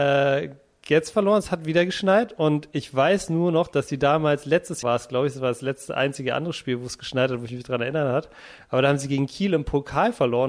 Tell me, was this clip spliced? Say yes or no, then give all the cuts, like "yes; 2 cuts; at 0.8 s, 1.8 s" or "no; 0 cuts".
yes; 1 cut; at 4.8 s